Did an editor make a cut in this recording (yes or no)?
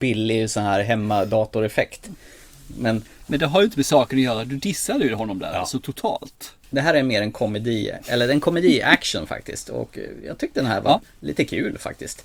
no